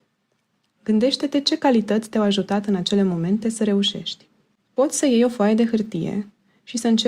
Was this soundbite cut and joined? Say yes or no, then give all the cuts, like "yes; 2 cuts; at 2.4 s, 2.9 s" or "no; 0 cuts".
no; 0 cuts